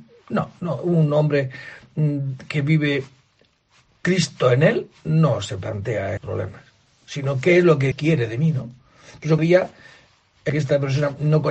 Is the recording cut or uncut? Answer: cut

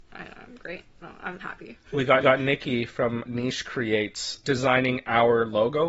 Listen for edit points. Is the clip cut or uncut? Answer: cut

